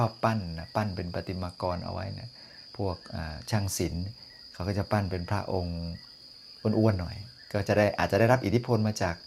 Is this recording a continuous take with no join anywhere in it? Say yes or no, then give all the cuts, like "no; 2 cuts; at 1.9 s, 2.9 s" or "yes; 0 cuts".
no; 1 cut; at 2.7 s